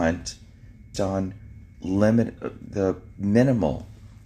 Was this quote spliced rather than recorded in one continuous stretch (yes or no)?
yes